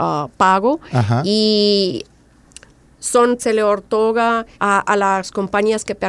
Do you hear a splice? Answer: yes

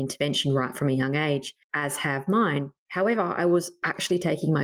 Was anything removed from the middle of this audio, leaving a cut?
yes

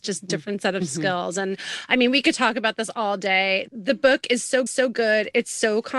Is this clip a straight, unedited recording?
no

